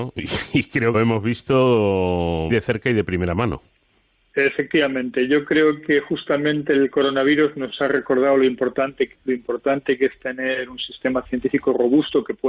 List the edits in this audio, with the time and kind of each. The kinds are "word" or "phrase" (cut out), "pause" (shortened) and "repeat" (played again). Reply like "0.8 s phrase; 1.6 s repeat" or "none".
0.9 s phrase; 2.5 s word; 9.1 s phrase